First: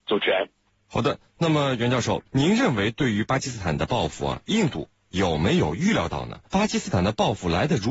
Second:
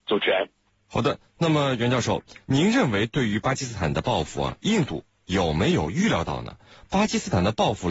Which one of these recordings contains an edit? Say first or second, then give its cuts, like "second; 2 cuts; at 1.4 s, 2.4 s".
first; 2 cuts; at 2.3 s, 6.5 s